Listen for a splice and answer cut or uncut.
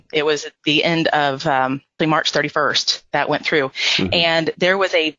cut